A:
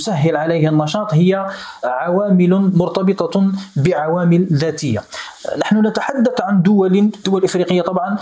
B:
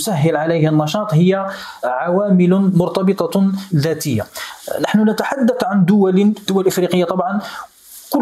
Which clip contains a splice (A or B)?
B